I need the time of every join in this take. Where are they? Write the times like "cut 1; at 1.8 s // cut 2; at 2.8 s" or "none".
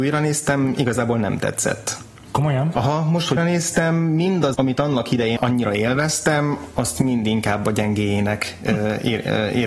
cut 1; at 3.4 s // cut 2; at 4.5 s // cut 3; at 5.4 s